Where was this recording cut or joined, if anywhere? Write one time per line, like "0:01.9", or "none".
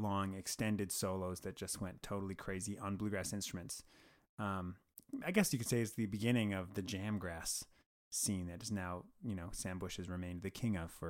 none